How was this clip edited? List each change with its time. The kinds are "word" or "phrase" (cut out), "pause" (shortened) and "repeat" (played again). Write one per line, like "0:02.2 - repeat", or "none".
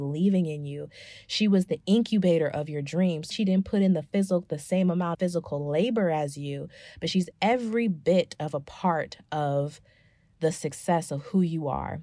0:03.3 - word
0:05.1 - word
0:07.3 - word